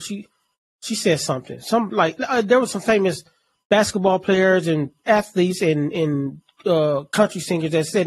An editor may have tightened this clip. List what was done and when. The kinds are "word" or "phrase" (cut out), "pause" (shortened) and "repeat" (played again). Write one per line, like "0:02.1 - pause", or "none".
none